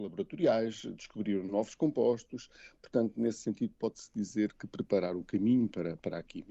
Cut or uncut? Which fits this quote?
uncut